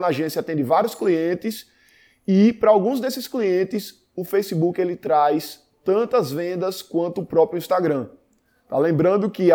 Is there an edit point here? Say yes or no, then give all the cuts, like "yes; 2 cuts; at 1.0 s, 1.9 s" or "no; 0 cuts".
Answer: no; 0 cuts